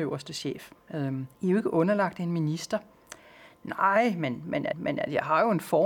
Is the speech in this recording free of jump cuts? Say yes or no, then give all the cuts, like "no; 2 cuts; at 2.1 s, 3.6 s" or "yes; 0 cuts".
no; 2 cuts; at 1.4 s, 4.7 s